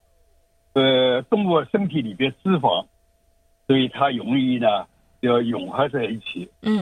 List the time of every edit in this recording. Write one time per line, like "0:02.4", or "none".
none